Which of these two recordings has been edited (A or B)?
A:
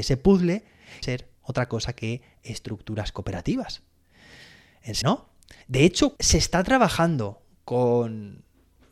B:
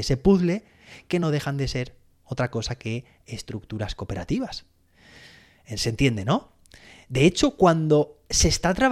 A